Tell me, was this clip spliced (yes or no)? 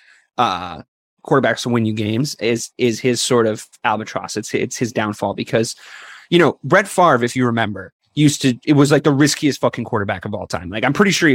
no